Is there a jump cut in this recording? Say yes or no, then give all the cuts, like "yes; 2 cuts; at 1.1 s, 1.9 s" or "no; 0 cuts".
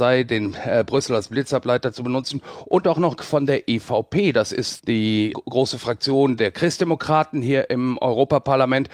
yes; 4 cuts; at 2.8 s, 3.2 s, 4.8 s, 5.3 s